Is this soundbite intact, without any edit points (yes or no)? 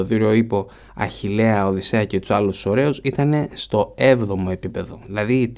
yes